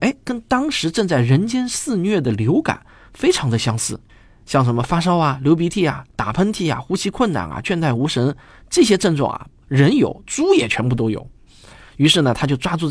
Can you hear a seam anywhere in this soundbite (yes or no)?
no